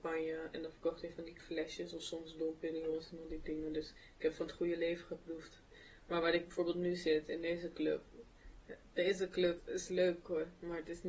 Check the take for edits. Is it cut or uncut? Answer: cut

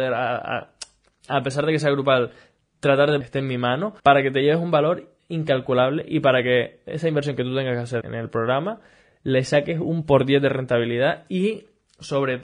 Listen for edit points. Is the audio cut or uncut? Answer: cut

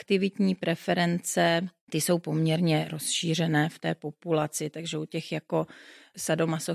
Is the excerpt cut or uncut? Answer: uncut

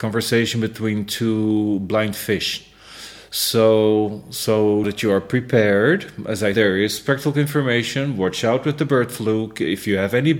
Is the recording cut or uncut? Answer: cut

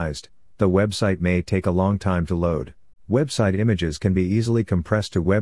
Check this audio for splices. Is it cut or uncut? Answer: cut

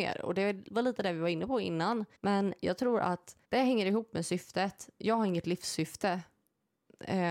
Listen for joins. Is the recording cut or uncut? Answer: cut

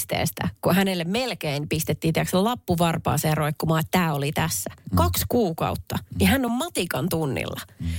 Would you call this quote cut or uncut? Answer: uncut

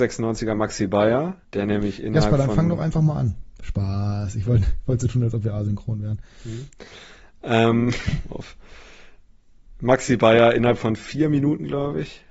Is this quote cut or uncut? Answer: cut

